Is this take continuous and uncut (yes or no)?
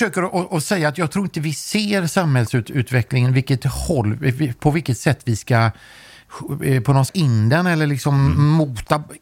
no